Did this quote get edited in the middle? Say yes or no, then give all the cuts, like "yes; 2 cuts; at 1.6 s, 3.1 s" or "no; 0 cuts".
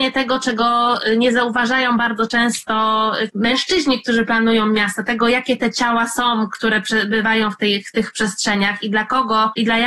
yes; 1 cut; at 3.3 s